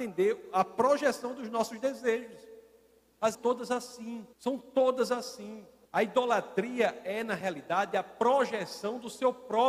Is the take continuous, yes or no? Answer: no